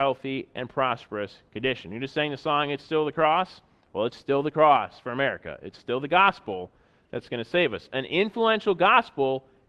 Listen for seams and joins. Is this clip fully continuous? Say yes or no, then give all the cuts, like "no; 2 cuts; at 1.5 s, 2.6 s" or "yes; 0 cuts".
yes; 0 cuts